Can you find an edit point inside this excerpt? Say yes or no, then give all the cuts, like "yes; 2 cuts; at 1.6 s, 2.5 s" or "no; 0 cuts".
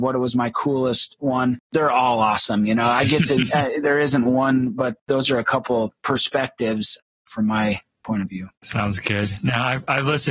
yes; 3 cuts; at 1.6 s, 5.0 s, 8.5 s